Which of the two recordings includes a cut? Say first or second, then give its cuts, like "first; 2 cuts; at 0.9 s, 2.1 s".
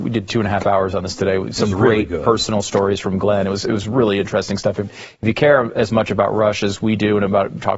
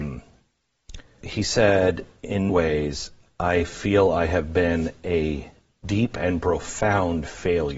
second; 2 cuts; at 1.2 s, 2.5 s